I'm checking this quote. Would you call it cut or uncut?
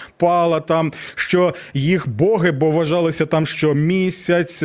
uncut